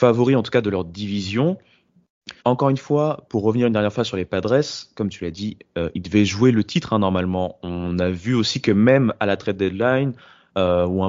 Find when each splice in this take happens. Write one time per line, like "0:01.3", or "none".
0:02.4